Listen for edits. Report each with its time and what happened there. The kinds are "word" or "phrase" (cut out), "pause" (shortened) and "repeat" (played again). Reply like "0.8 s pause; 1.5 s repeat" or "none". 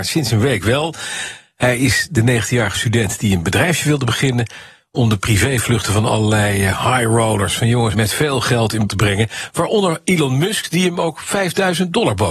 7.9 s word; 8.9 s word

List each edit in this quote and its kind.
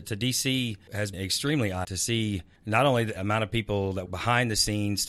1.1 s word; 1.8 s word; 3.2 s word; 4.1 s word

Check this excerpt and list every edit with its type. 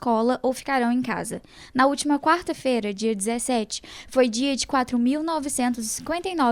none

